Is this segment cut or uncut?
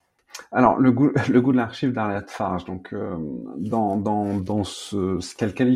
uncut